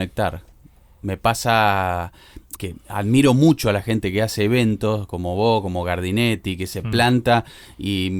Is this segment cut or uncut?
cut